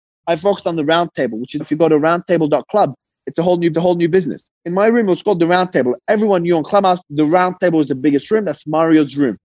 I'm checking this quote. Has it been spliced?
yes; 2 cuts; at 1.6 s, 3.7 s

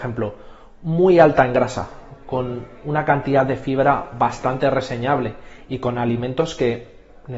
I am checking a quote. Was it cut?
no; 0 cuts

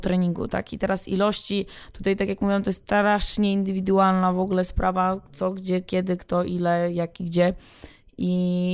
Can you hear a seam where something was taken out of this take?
no; 0 cuts

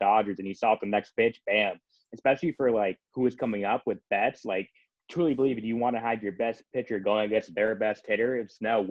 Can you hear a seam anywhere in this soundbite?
yes; 2 cuts; at 3.1 s, 5.0 s

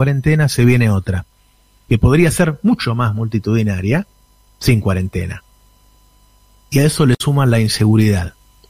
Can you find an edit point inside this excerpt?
no; 0 cuts

